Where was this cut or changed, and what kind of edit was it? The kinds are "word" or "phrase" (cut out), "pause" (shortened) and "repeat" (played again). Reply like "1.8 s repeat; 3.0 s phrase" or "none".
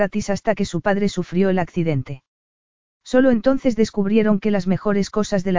none